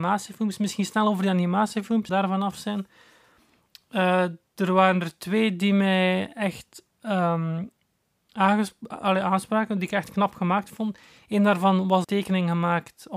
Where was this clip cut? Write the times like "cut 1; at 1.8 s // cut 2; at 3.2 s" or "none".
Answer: cut 1; at 2.1 s // cut 2; at 12.0 s